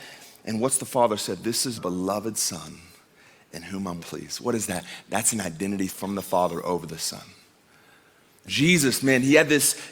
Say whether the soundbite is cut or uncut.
cut